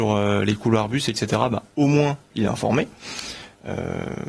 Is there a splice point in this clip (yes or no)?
no